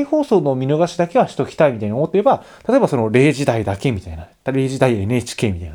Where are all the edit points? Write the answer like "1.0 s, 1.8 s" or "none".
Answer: none